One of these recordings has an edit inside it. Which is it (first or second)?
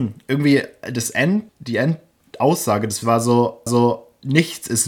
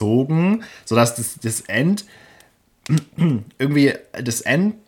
first